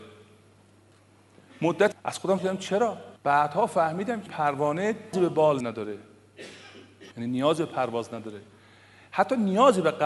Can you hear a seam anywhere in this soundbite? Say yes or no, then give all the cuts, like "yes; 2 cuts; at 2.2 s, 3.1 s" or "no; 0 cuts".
yes; 7 cuts; at 1.9 s, 2.4 s, 3.2 s, 4.3 s, 5.1 s, 5.6 s, 7.1 s